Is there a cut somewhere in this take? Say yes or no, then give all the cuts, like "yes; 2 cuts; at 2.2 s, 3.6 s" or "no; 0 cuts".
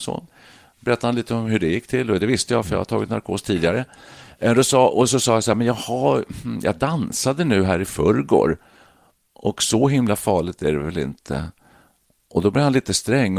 no; 0 cuts